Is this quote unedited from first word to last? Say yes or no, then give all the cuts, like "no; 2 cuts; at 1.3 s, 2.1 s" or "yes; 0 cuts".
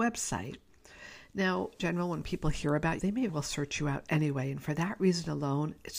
no; 3 cuts; at 1.8 s, 3.0 s, 3.3 s